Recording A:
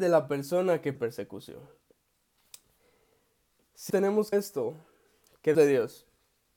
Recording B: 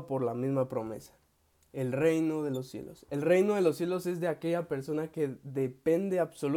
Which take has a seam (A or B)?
A